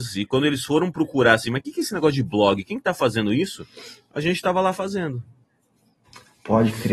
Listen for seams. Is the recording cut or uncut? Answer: uncut